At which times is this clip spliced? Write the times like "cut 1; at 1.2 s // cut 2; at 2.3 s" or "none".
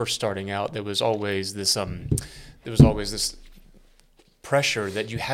none